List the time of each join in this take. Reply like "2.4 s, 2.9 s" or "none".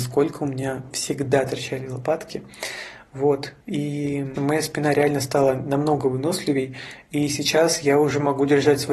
3.6 s, 4.4 s

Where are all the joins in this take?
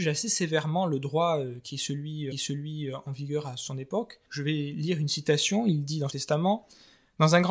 2.3 s, 4.2 s, 6.1 s

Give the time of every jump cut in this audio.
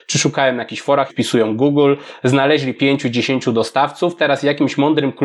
1.1 s, 2.8 s

